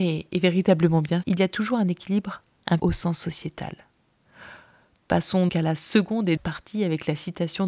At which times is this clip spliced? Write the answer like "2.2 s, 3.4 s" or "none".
1.2 s, 2.8 s, 5.5 s, 6.4 s